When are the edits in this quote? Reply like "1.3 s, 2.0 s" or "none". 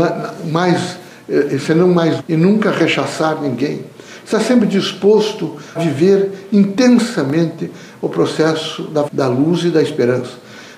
2.2 s, 5.8 s, 9.1 s

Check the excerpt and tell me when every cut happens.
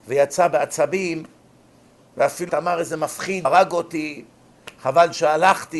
2.5 s, 3.4 s

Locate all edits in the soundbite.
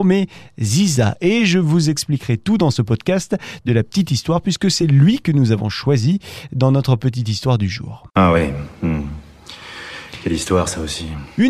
none

